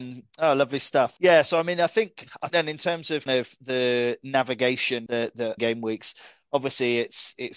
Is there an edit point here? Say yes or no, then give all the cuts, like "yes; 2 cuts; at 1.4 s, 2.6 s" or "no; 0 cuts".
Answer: yes; 5 cuts; at 1.2 s, 2.5 s, 3.3 s, 5.1 s, 5.6 s